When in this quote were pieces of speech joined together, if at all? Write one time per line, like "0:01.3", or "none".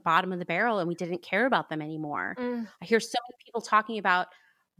none

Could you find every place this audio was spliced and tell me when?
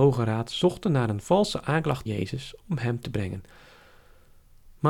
0:02.1
0:03.0

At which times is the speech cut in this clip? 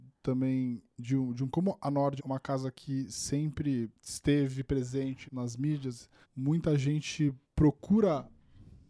0:00.9
0:01.5
0:02.2
0:03.9
0:05.3
0:06.2
0:07.4

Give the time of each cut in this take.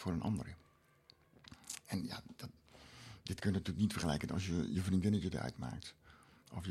none

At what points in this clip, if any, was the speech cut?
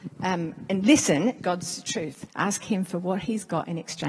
0:01.4
0:02.3

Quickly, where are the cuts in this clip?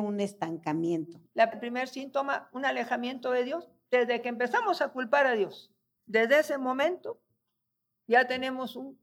0:01.5

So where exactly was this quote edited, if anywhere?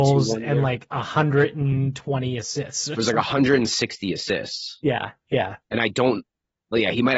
0:05.6

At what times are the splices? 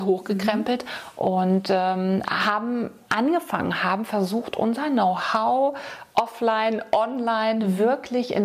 none

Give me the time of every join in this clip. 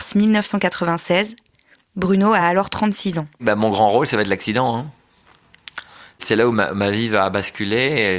none

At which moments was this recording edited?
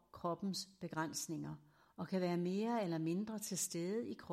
none

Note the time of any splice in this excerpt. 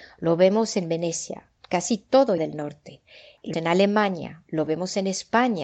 0:01.6
0:02.4
0:03.5
0:04.7

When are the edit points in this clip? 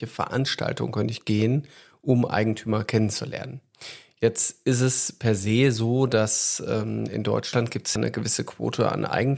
0:08.0

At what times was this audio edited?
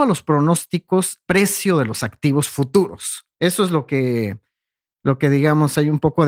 0:01.3
0:03.3

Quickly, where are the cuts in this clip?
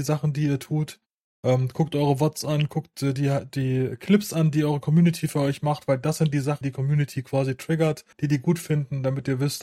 0:01.2
0:06.6
0:08.1

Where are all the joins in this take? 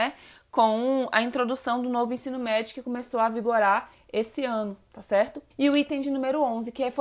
0:05.5

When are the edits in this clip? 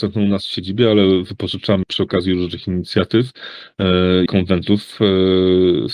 0:01.8
0:04.3

